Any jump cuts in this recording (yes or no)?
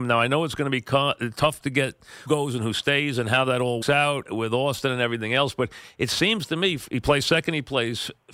yes